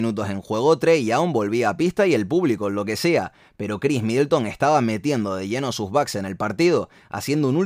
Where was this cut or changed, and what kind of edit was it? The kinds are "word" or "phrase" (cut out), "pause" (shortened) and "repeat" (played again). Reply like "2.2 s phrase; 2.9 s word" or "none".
none